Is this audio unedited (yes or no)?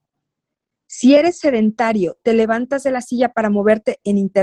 yes